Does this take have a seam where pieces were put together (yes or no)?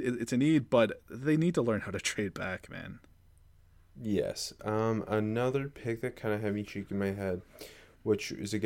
no